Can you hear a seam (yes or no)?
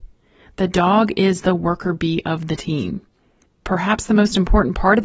no